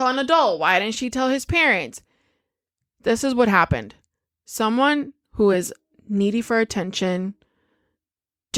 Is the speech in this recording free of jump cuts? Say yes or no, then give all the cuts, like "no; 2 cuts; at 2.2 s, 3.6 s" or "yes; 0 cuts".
yes; 0 cuts